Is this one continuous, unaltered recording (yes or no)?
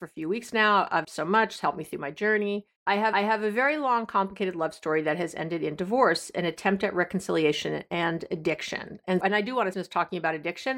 no